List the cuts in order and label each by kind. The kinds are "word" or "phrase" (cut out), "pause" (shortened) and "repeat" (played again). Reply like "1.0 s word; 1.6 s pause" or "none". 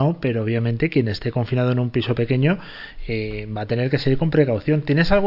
none

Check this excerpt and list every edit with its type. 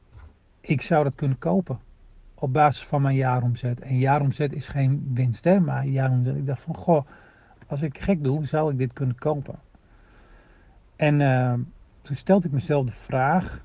none

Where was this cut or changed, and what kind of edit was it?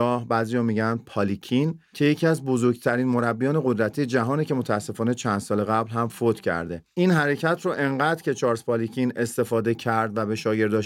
none

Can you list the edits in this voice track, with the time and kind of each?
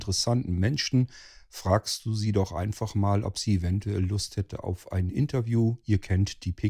none

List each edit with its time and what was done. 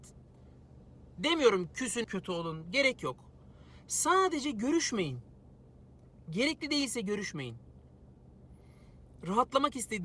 2.0 s word

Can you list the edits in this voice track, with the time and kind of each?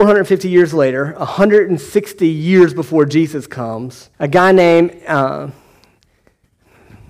4.1 s pause

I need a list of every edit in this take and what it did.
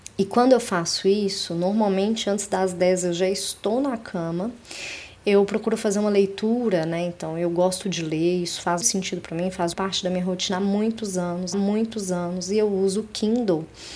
7.8 s word; 8.8 s word; 9.7 s word; 11.5 s repeat

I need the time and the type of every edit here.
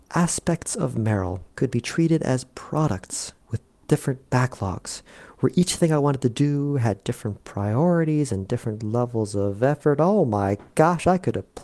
1.5 s pause; 3.4 s pause

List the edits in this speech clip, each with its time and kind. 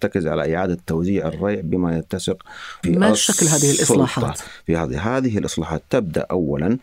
2.8 s phrase

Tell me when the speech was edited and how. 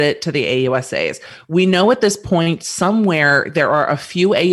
none

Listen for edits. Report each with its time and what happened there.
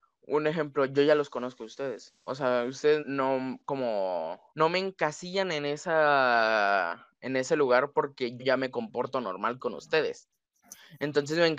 3.0 s word; 4.5 s pause; 8.4 s word

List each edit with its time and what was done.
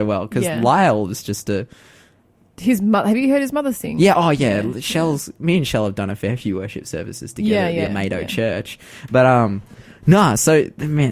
7.9 s word

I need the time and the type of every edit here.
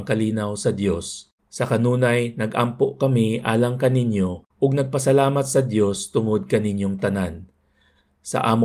1.4 s pause; 4.5 s pause

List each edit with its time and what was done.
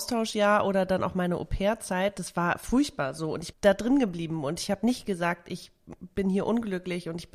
3.5 s word

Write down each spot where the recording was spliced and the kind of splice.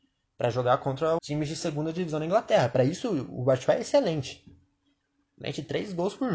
1.2 s word

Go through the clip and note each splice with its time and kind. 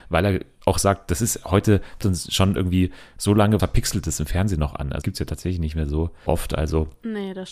2.0 s word; 3.6 s word; 5.0 s word; 6.3 s word

